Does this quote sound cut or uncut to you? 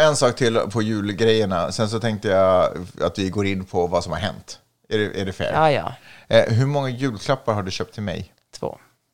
uncut